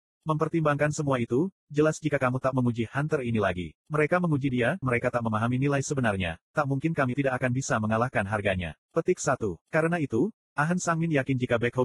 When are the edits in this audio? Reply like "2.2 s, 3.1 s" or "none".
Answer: 2.5 s, 3.8 s, 4.8 s, 7.1 s, 8.8 s, 9.6 s

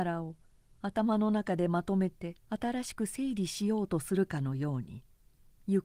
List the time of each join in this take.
2.4 s

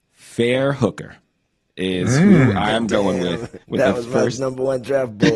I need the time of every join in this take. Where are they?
3.6 s

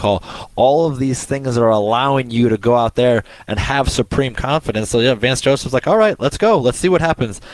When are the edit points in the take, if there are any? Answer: none

